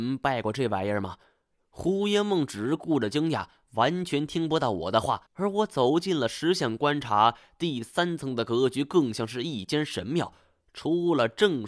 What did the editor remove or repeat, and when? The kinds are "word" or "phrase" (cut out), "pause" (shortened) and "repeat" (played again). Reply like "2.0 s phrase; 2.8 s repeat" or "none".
5.3 s pause